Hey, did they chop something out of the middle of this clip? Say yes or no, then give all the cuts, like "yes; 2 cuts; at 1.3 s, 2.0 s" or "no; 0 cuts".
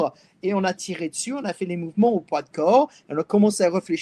no; 0 cuts